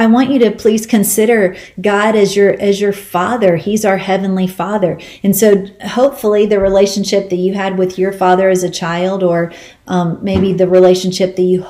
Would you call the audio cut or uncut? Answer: uncut